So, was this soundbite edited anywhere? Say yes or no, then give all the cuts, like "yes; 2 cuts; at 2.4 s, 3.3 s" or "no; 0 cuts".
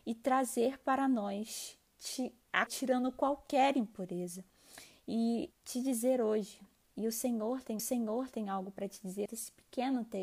yes; 5 cuts; at 2.7 s, 5.5 s, 6.8 s, 7.8 s, 9.3 s